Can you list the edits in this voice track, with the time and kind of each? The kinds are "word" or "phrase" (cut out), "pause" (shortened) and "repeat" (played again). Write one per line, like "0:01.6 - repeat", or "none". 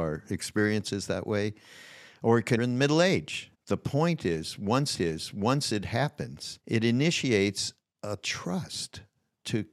0:02.6 - phrase
0:03.5 - pause
0:04.9 - repeat
0:06.6 - pause